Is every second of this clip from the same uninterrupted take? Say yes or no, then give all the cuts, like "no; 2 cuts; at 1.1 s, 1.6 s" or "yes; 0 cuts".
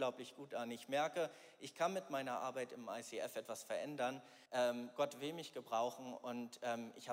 no; 1 cut; at 4.5 s